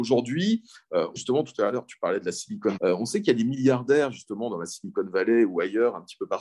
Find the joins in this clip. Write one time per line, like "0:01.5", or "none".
0:01.2
0:02.8